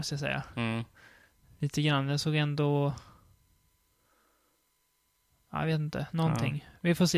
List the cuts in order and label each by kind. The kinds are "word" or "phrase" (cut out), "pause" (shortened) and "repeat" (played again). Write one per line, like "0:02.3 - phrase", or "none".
none